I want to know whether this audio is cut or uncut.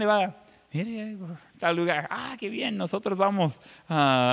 uncut